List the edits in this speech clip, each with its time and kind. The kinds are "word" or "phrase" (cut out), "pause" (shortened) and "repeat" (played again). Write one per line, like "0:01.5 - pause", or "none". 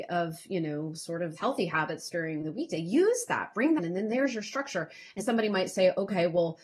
0:01.4 - word
0:03.8 - phrase
0:05.2 - word